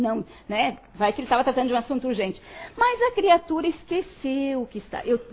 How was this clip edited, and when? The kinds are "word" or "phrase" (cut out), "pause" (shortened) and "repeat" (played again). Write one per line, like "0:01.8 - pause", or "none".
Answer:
none